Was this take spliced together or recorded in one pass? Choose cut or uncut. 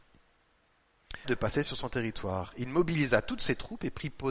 cut